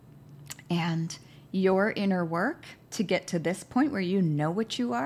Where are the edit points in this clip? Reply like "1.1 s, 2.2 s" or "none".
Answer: 2.8 s